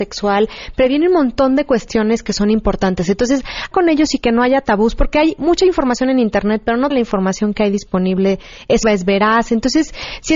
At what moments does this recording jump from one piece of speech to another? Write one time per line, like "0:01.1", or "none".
0:03.7
0:06.9
0:08.8